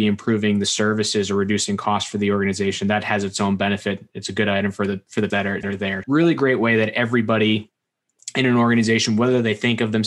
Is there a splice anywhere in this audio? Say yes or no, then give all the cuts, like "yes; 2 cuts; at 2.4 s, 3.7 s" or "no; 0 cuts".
yes; 3 cuts; at 5.3 s, 5.6 s, 6.0 s